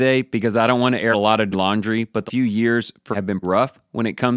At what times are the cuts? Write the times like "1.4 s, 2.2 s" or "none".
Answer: 1.1 s, 1.5 s, 2.3 s, 3.1 s, 3.4 s